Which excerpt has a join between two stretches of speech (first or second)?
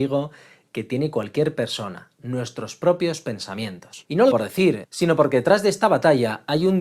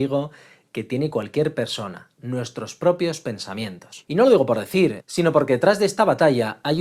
first